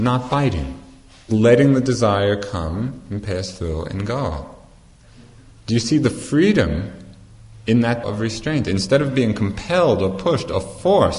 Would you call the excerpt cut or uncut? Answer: cut